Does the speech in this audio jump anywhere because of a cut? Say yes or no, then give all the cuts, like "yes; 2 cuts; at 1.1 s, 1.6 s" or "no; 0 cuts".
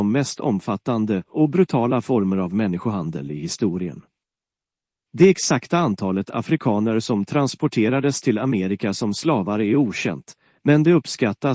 no; 0 cuts